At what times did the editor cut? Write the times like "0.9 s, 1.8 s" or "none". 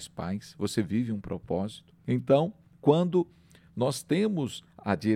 none